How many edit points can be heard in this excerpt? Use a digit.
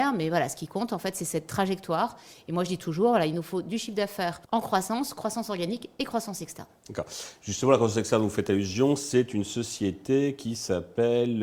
1